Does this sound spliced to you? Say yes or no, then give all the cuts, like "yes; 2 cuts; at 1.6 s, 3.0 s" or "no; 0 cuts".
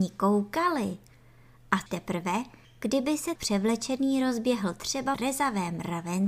yes; 3 cuts; at 1.9 s, 3.4 s, 5.1 s